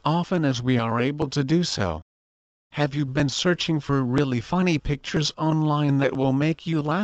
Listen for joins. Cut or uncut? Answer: uncut